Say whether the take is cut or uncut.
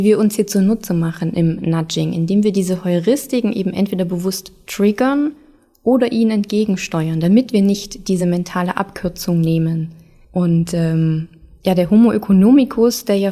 uncut